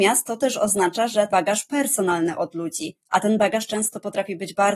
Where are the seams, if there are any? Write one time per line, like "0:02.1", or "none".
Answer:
0:01.3

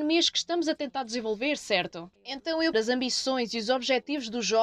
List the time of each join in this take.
0:02.2
0:02.7

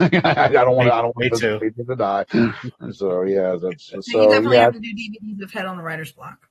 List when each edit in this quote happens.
none

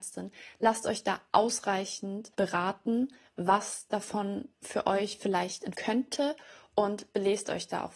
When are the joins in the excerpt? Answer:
0:02.3
0:04.5
0:05.7

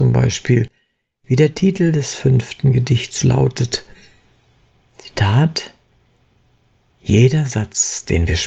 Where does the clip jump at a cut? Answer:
none

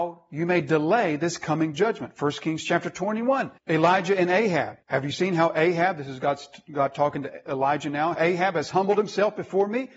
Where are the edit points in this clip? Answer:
0:03.6
0:04.8
0:08.1

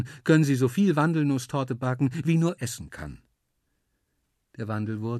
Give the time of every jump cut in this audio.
0:02.6

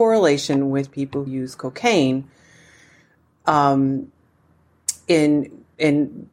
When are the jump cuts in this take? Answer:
0:01.3

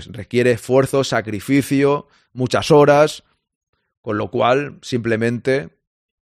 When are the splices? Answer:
none

